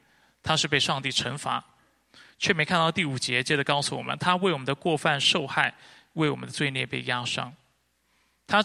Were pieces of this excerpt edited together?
no; 0 cuts

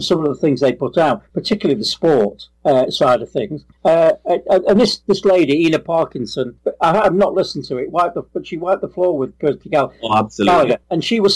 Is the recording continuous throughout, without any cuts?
yes; 0 cuts

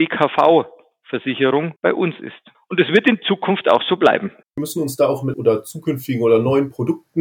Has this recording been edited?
yes; 4 cuts; at 1.8 s, 2.5 s, 4.4 s, 5.3 s

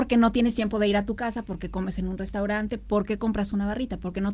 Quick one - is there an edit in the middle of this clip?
no; 0 cuts

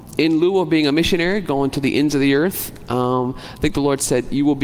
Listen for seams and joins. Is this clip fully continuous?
yes; 0 cuts

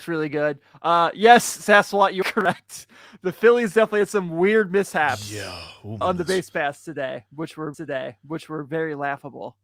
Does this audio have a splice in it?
yes; 3 cuts; at 2.2 s, 6.0 s, 7.7 s

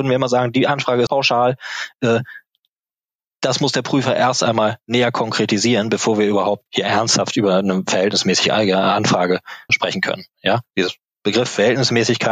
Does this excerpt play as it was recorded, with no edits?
no; 4 cuts; at 1.1 s, 6.7 s, 9.7 s, 10.7 s

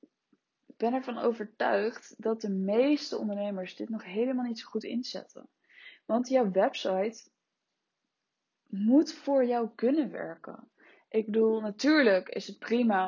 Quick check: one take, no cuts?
yes; 0 cuts

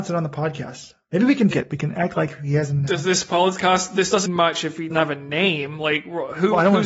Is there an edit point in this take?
yes; 3 cuts; at 1.5 s, 4.3 s, 4.9 s

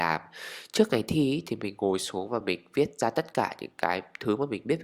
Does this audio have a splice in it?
no; 0 cuts

